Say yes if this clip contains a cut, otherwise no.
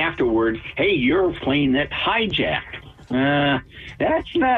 yes